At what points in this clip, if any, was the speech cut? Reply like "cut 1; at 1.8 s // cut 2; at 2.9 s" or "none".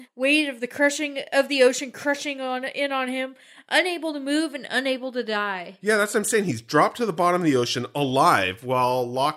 none